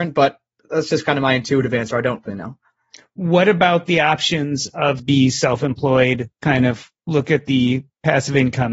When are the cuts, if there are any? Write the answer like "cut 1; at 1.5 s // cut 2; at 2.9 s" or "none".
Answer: cut 1; at 2.3 s // cut 2; at 5.0 s